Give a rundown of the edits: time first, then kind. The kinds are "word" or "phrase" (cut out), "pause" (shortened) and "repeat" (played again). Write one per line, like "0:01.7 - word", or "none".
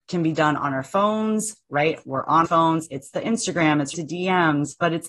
0:02.5 - word
0:03.9 - word